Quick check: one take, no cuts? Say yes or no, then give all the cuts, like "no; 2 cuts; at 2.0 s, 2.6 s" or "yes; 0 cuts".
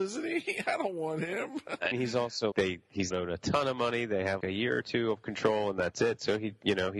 no; 4 cuts; at 1.9 s, 2.5 s, 3.1 s, 4.4 s